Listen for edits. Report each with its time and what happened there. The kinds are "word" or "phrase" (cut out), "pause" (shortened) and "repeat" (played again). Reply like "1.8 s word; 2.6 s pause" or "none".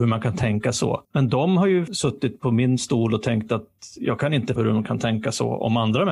1.0 s pause; 1.9 s word; 4.6 s word